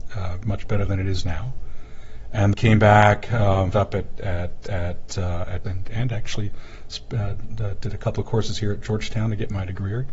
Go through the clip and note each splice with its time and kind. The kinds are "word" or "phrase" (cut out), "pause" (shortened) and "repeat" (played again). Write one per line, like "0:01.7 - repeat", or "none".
0:02.5 - word
0:03.7 - word
0:04.6 - repeat
0:05.6 - word